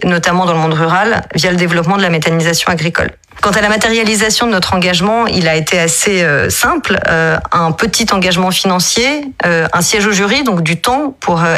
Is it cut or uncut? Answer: uncut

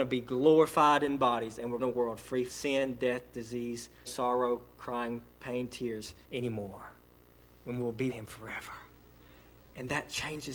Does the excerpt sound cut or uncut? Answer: cut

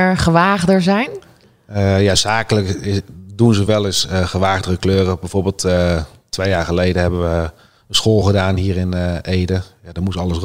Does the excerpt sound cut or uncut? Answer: uncut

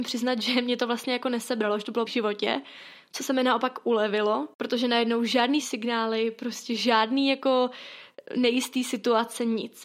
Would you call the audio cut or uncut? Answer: cut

